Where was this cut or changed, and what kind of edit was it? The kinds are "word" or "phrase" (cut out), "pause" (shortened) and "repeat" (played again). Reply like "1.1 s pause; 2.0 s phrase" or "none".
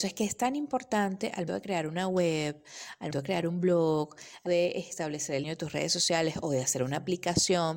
1.5 s word; 3.1 s word; 4.5 s word; 5.4 s word